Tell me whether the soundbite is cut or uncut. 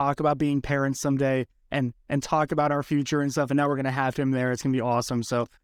uncut